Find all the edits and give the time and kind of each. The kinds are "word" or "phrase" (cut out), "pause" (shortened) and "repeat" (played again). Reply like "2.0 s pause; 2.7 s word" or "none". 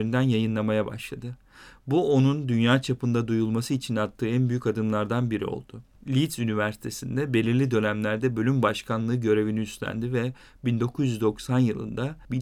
none